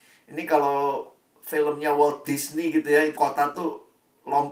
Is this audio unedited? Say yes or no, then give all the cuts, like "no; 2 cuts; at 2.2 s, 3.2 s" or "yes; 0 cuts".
no; 1 cut; at 3.2 s